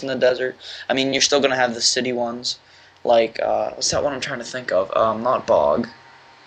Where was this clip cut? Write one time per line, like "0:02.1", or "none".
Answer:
none